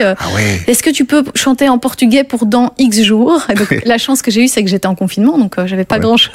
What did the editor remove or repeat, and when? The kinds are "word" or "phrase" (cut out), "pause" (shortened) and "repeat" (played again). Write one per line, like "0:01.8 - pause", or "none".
none